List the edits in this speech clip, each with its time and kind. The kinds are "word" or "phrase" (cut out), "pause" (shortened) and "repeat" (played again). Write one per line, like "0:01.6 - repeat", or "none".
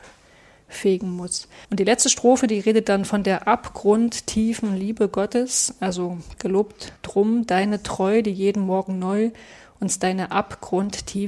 0:01.6 - pause
0:07.0 - pause